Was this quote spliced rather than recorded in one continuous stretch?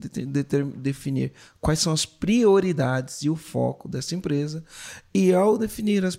no; 0 cuts

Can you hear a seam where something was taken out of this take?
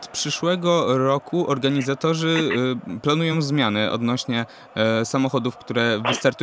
no; 0 cuts

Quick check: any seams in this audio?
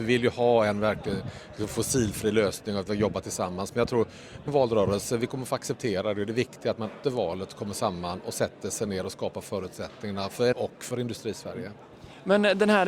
yes; 3 cuts; at 4.5 s, 7.0 s, 10.5 s

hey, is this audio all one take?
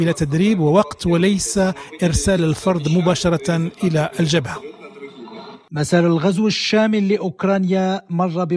yes; 0 cuts

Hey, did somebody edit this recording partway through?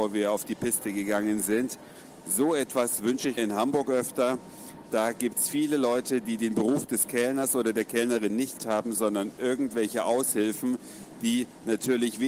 yes; 2 cuts; at 3.4 s, 8.6 s

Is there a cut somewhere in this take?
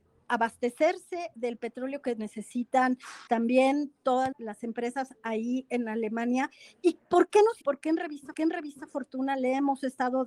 yes; 4 cuts; at 3.3 s, 4.3 s, 7.6 s, 8.3 s

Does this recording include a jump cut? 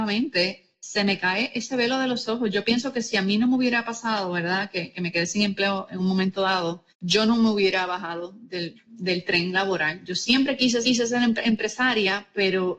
yes; 3 cuts; at 6.9 s, 8.8 s, 10.8 s

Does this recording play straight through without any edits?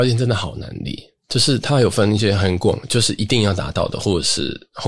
no; 1 cut; at 1.2 s

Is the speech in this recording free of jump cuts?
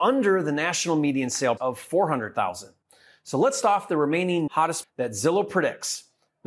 no; 4 cuts; at 1.6 s, 3.6 s, 4.5 s, 4.8 s

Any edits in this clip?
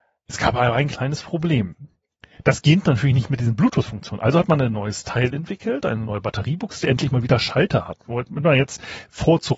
no; 0 cuts

